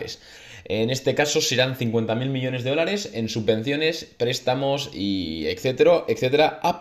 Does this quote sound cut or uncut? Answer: uncut